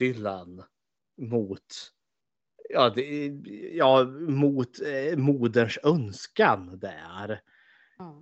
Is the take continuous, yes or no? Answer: yes